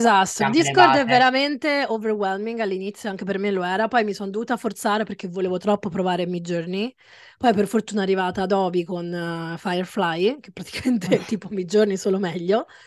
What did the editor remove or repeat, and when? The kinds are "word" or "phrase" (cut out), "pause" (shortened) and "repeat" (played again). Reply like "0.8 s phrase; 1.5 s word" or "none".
none